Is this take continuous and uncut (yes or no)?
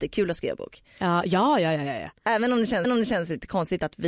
no